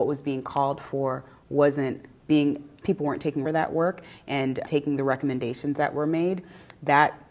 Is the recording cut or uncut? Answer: cut